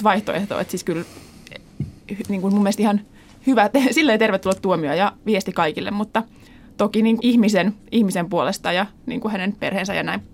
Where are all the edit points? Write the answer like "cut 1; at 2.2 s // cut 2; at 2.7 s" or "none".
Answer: cut 1; at 7.2 s